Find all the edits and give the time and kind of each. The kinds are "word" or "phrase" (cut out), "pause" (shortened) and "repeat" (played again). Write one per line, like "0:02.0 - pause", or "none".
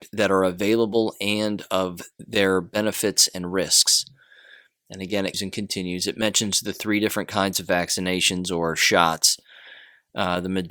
0:05.3 - word